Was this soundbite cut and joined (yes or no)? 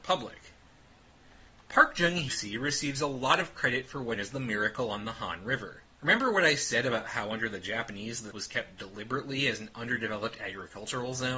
yes